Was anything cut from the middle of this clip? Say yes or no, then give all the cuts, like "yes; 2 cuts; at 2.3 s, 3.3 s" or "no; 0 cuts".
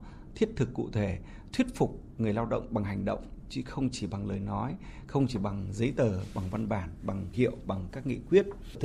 yes; 1 cut; at 7.3 s